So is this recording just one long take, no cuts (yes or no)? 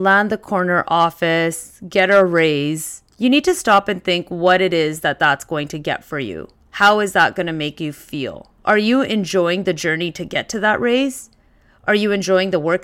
no